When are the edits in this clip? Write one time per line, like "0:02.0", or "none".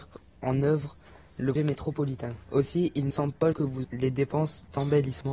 0:01.6
0:03.1
0:03.5
0:03.8